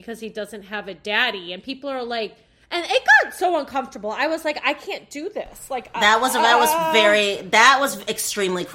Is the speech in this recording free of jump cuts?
yes; 0 cuts

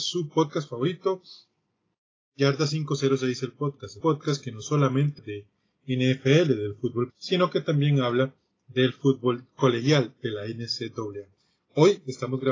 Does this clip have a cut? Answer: yes; 3 cuts; at 4.0 s, 5.2 s, 7.1 s

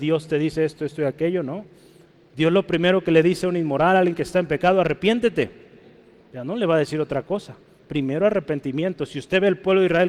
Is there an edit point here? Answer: no; 0 cuts

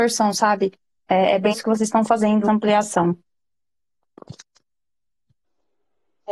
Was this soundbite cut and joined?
yes; 2 cuts; at 1.5 s, 2.4 s

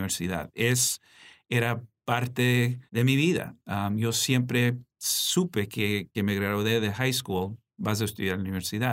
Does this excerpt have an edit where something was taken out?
yes; 2 cuts; at 2.9 s, 6.1 s

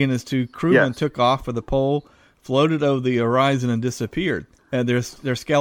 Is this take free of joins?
yes; 0 cuts

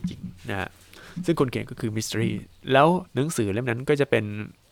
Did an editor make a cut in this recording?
yes; 1 cut; at 3.1 s

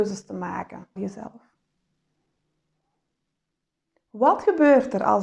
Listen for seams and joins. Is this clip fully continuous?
no; 1 cut; at 1.0 s

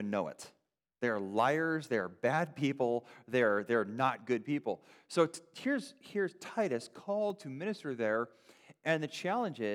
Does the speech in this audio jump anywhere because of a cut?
no; 0 cuts

